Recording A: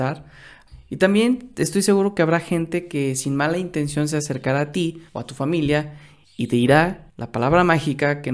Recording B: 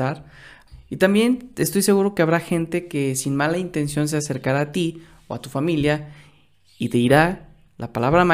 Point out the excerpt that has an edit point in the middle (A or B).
A